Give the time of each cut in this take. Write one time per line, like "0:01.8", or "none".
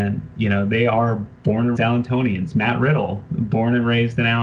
0:01.4
0:01.8